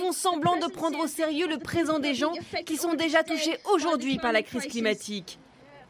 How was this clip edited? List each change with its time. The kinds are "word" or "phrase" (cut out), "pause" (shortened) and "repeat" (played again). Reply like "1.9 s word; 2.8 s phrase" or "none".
none